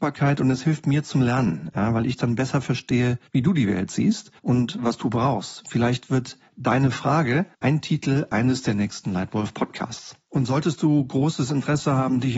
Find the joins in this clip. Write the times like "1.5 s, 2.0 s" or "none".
3.3 s, 4.4 s, 7.5 s